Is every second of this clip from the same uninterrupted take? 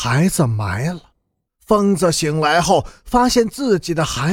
no; 1 cut; at 1.5 s

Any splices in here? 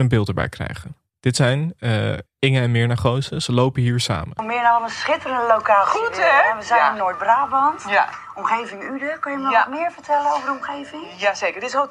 yes; 2 cuts; at 1.1 s, 2.3 s

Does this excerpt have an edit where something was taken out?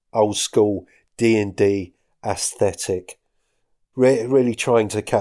no; 0 cuts

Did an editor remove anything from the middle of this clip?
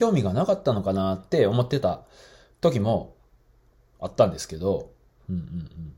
no; 0 cuts

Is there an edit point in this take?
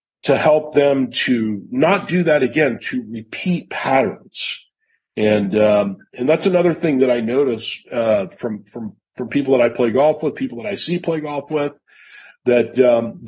no; 0 cuts

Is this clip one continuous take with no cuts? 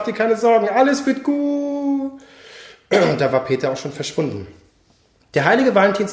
yes; 0 cuts

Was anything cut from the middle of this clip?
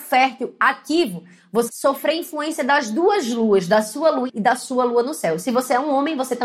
yes; 2 cuts; at 1.7 s, 4.3 s

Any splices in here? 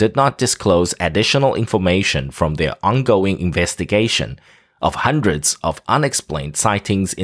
no; 0 cuts

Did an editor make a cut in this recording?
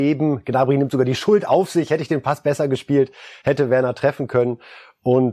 no; 0 cuts

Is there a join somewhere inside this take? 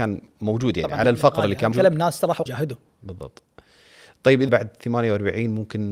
yes; 5 cuts; at 1.0 s, 1.7 s, 2.5 s, 3.0 s, 4.5 s

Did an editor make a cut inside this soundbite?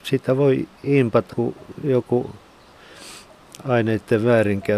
yes; 1 cut; at 1.3 s

